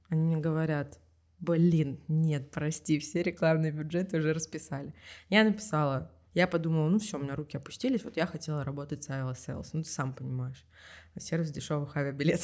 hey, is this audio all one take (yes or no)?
yes